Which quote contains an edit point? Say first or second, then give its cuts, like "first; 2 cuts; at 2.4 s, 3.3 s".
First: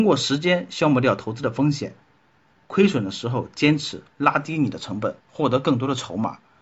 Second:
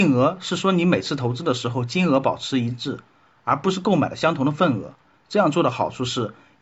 first; 1 cut; at 5.2 s